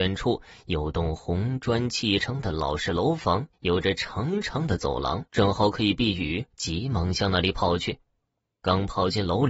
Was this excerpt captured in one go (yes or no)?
no